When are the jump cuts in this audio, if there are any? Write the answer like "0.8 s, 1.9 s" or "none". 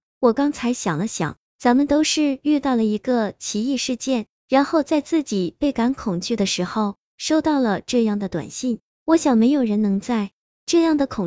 none